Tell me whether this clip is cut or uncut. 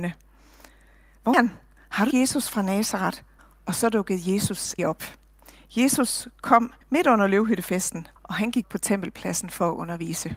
cut